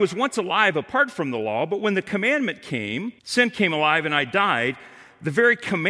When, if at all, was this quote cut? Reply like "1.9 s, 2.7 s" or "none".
3.2 s